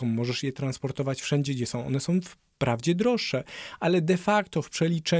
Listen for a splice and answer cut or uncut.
uncut